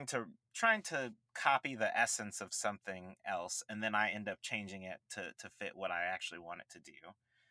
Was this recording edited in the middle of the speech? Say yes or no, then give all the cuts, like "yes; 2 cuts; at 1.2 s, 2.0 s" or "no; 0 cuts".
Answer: no; 0 cuts